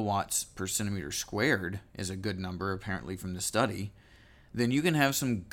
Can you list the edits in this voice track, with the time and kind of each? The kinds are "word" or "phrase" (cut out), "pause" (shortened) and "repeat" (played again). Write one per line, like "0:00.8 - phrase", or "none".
none